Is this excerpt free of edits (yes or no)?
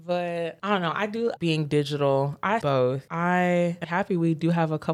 no